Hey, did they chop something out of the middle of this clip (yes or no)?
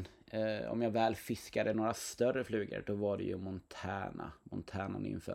no